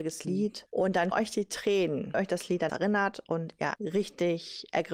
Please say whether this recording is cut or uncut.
cut